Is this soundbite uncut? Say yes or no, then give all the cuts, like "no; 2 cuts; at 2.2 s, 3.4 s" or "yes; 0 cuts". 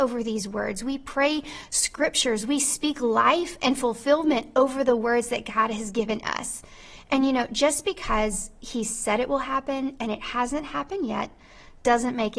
yes; 0 cuts